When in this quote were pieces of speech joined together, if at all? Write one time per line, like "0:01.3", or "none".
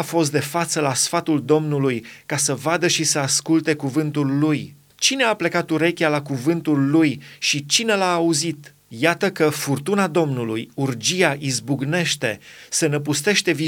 0:04.9
0:08.8